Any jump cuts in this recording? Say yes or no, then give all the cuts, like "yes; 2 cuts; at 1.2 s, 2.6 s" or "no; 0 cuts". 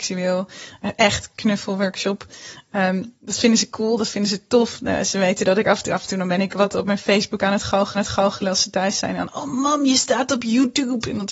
yes; 1 cut; at 7.9 s